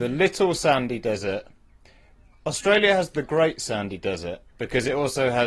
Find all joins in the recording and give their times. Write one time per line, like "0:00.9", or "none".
none